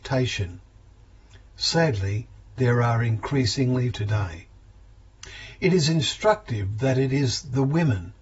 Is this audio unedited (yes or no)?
no